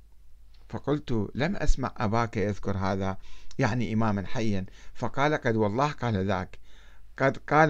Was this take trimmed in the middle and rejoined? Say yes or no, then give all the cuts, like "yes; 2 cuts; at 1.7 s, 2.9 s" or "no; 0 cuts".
no; 0 cuts